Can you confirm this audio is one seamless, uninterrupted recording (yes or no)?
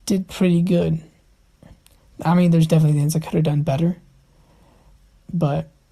yes